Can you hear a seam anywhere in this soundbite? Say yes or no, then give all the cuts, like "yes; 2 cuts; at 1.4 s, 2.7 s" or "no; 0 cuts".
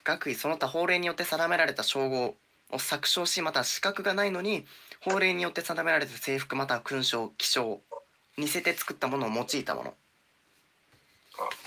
no; 0 cuts